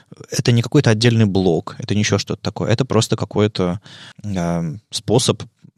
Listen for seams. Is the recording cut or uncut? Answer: cut